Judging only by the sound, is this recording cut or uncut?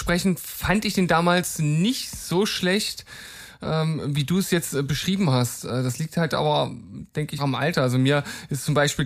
cut